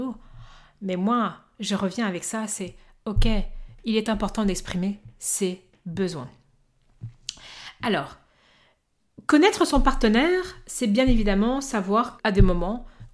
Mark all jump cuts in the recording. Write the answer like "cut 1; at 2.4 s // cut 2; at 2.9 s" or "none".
cut 1; at 12.2 s